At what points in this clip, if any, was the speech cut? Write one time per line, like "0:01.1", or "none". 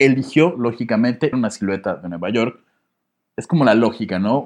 0:01.3